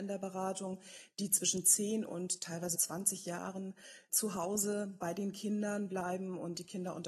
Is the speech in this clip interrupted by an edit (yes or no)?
yes